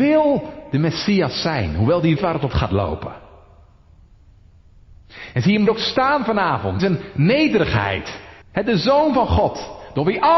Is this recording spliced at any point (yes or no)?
yes